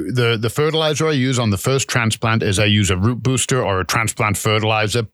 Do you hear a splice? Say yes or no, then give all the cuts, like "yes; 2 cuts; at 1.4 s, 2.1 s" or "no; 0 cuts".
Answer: no; 0 cuts